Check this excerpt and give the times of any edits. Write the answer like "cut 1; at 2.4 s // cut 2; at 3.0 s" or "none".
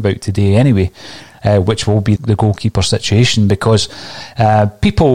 cut 1; at 2.2 s